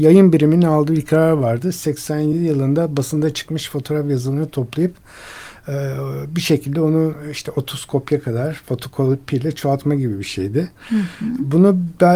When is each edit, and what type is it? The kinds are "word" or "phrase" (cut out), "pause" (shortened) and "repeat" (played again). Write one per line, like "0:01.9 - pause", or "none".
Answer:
none